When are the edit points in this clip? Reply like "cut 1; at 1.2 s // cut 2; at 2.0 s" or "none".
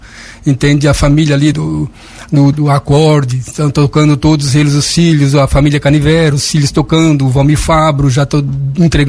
cut 1; at 1.5 s // cut 2; at 2.5 s

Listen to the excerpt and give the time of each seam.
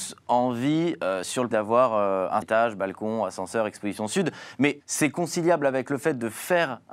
cut 1; at 1.5 s // cut 2; at 2.4 s // cut 3; at 4.8 s

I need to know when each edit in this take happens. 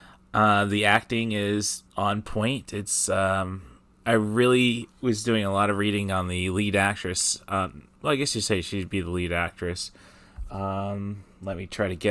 cut 1; at 1.9 s // cut 2; at 4.0 s // cut 3; at 4.9 s // cut 4; at 7.9 s

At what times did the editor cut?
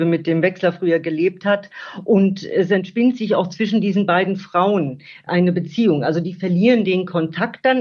cut 1; at 5.3 s

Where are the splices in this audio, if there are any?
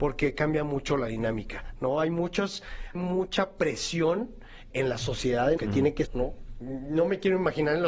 cut 1; at 3.0 s // cut 2; at 4.7 s // cut 3; at 5.6 s // cut 4; at 6.1 s

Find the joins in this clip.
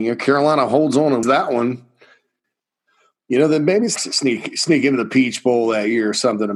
cut 1; at 1.2 s // cut 2; at 4.0 s

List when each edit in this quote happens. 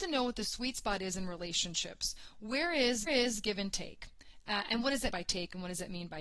cut 1; at 3.1 s // cut 2; at 5.1 s

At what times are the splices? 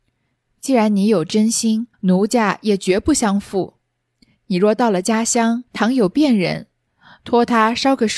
cut 1; at 1.9 s // cut 2; at 5.7 s

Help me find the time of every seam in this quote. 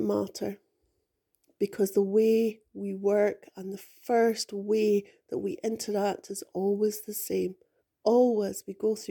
cut 1; at 7.8 s

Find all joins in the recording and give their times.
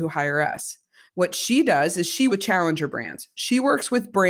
cut 1; at 1.1 s // cut 2; at 2.3 s

